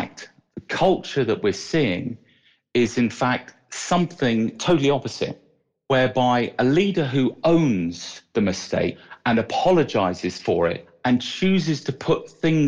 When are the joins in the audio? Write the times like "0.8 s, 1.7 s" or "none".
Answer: none